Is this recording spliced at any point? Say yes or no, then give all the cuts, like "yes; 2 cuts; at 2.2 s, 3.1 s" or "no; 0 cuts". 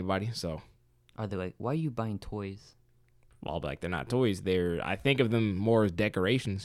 no; 0 cuts